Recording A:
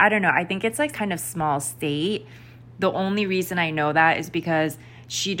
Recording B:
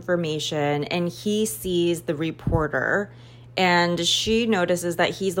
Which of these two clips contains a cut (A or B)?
A